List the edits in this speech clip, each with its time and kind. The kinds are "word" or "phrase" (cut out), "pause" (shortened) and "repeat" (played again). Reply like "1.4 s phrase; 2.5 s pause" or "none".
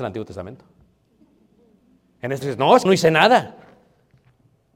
2.4 s word; 2.9 s phrase